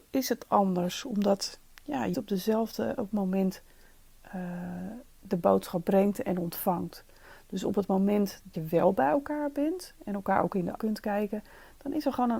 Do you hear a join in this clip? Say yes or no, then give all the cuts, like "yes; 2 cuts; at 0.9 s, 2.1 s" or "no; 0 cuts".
yes; 4 cuts; at 2.1 s, 3.1 s, 8.5 s, 10.8 s